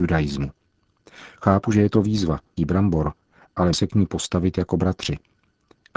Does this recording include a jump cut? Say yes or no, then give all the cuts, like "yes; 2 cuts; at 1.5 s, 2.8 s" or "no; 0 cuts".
yes; 2 cuts; at 2.6 s, 3.7 s